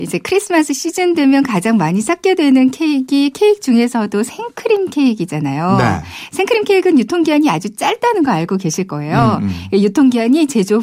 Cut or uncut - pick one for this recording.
uncut